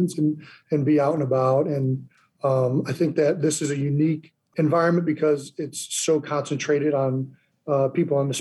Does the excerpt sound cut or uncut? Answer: uncut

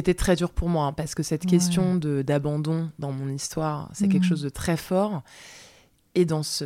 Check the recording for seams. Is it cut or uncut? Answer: uncut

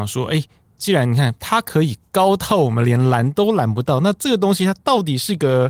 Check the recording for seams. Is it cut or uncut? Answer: uncut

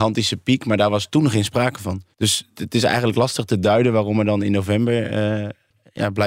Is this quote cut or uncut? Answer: cut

